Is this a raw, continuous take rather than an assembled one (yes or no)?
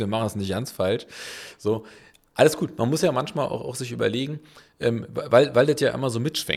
yes